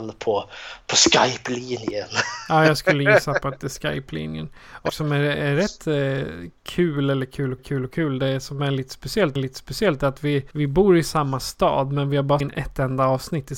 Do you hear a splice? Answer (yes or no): yes